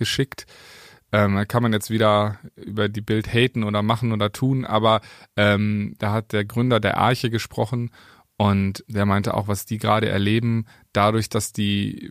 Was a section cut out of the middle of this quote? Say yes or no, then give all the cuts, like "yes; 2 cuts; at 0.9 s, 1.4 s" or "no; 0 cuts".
yes; 1 cut; at 8.8 s